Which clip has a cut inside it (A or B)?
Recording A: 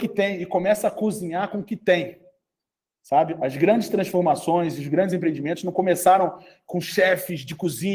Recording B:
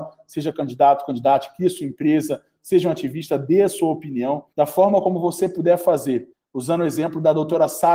B